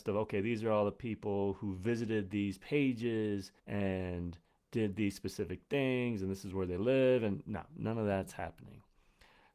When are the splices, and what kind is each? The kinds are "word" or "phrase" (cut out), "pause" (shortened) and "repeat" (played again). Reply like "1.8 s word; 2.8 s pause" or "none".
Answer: 3.6 s pause